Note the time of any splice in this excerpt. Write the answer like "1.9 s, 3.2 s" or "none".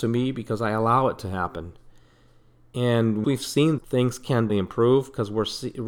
3.2 s, 3.8 s, 4.5 s